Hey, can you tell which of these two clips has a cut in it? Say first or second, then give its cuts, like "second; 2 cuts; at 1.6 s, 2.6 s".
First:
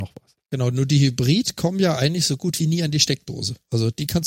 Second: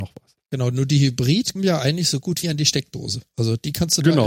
second; 2 cuts; at 1.6 s, 2.4 s